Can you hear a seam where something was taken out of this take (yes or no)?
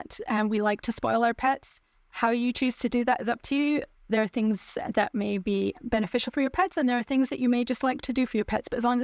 no